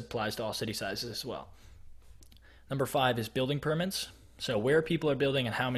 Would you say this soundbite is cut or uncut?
uncut